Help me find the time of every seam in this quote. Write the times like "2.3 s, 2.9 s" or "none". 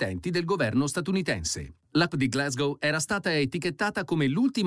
2.1 s